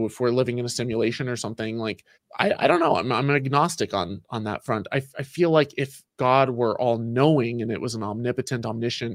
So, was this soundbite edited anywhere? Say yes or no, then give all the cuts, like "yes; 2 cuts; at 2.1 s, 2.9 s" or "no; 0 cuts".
yes; 1 cut; at 2.1 s